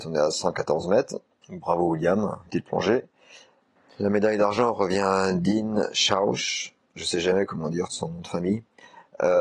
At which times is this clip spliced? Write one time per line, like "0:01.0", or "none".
0:02.5
0:06.8
0:07.9